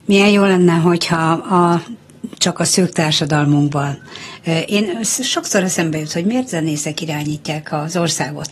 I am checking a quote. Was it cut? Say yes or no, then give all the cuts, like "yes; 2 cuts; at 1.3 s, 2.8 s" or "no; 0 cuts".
yes; 1 cut; at 6.5 s